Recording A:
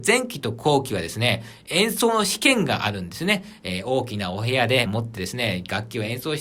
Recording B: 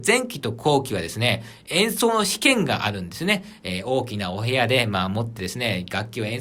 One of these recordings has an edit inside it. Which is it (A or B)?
A